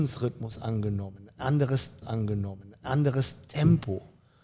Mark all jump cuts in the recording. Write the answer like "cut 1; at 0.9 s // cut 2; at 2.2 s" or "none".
cut 1; at 2.0 s